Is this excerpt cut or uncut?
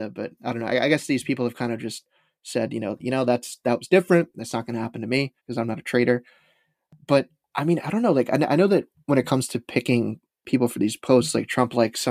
cut